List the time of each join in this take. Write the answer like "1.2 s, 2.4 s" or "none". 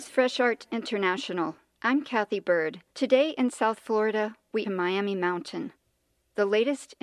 2.9 s, 4.6 s